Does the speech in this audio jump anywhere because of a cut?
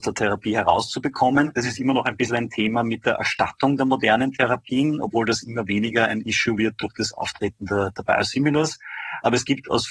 no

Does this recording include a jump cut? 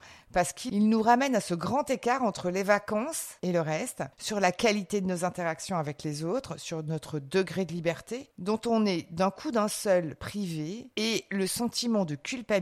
no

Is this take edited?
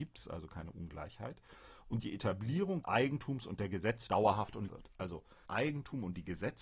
yes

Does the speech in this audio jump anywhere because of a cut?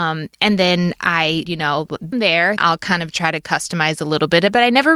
yes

